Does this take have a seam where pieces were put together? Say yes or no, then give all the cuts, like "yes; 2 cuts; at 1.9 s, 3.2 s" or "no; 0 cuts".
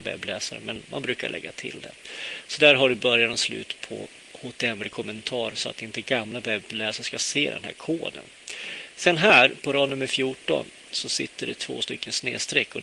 no; 0 cuts